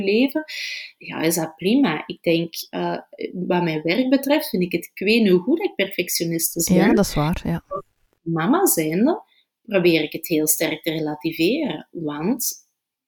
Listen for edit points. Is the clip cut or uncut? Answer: uncut